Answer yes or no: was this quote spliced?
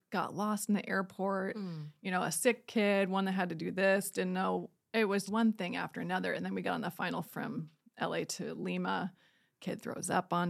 yes